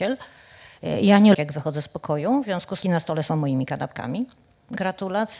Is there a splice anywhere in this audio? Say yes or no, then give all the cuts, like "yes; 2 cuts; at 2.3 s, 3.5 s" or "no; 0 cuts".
yes; 2 cuts; at 1.3 s, 2.8 s